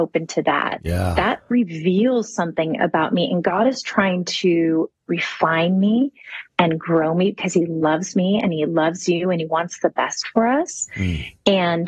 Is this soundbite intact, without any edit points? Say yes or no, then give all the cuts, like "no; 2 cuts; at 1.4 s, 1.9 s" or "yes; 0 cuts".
yes; 0 cuts